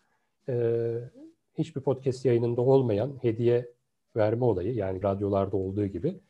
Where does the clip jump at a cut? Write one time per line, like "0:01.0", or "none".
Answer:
0:05.0